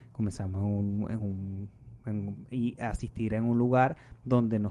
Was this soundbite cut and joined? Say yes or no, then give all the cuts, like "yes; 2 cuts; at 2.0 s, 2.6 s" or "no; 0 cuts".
no; 0 cuts